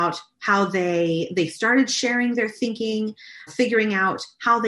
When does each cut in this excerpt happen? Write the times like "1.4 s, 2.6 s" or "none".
3.5 s